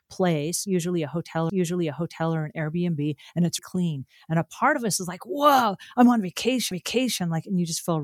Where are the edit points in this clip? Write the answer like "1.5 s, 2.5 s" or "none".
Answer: 1.5 s, 3.6 s, 6.7 s